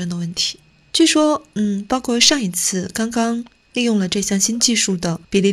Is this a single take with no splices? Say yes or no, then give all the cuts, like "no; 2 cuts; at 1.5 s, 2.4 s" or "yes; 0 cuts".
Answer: yes; 0 cuts